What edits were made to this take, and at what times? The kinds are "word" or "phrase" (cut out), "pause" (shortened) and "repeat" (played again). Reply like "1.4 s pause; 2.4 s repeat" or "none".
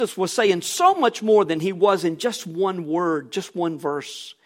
none